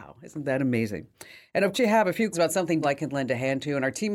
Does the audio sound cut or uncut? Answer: cut